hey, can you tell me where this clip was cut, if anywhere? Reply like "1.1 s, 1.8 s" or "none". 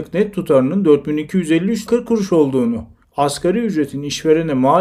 1.9 s, 3.0 s